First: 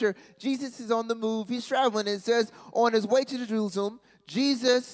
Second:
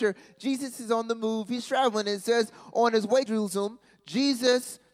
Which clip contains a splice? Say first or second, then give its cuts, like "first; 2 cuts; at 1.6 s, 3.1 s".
second; 1 cut; at 3.3 s